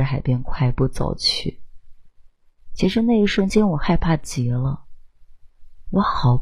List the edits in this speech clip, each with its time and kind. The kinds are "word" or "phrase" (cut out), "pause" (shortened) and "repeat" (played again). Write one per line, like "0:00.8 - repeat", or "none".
none